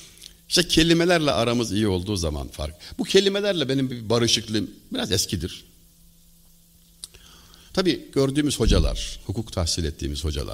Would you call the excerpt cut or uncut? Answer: uncut